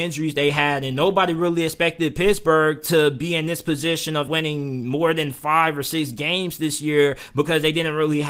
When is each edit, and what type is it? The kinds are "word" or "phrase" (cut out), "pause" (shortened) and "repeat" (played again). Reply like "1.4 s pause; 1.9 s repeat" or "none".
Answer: 4.3 s word